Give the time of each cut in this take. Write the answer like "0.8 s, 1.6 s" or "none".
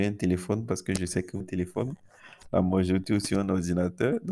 1.4 s